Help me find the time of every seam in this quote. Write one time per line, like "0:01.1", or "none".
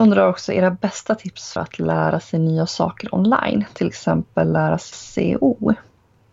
0:01.6
0:04.9